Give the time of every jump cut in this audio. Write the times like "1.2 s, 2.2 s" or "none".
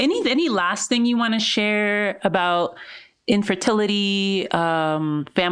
none